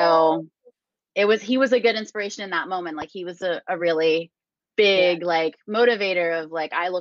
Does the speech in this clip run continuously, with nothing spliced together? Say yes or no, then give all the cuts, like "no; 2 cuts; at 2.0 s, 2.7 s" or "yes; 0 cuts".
yes; 0 cuts